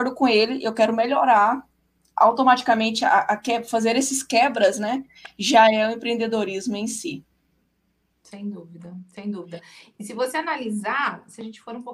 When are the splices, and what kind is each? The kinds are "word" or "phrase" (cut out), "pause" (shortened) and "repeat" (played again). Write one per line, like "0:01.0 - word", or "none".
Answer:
none